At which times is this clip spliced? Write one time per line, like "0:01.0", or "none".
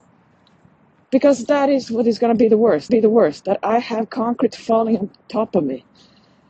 0:02.9